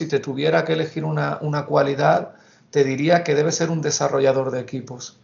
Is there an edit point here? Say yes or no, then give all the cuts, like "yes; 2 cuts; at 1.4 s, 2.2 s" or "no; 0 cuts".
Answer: no; 0 cuts